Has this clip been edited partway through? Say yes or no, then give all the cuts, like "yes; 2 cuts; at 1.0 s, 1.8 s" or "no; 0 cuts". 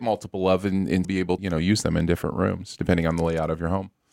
yes; 2 cuts; at 1.0 s, 1.4 s